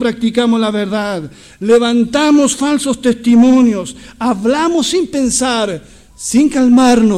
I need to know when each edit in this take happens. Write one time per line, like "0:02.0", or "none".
none